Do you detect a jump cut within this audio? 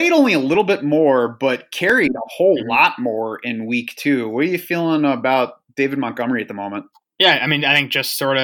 no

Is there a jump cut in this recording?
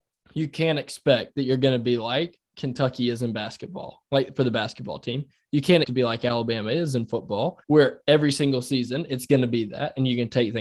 yes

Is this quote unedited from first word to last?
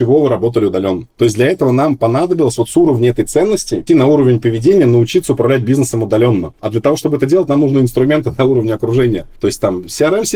no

